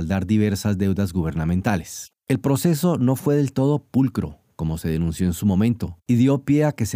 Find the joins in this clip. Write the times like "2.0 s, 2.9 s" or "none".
2.2 s, 6.0 s